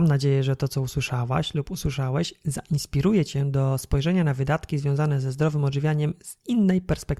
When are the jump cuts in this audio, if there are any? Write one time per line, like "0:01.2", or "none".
none